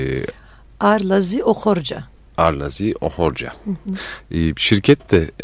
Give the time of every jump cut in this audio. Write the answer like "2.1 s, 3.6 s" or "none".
none